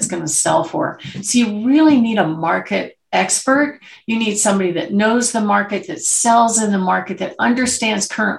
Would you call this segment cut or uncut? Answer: uncut